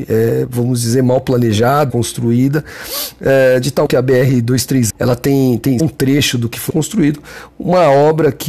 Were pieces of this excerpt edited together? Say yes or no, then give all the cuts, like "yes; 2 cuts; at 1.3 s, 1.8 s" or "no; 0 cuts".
yes; 5 cuts; at 1.9 s, 3.9 s, 4.9 s, 5.8 s, 6.7 s